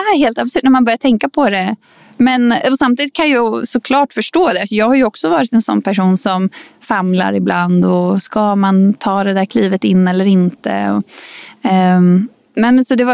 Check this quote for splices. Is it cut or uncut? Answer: uncut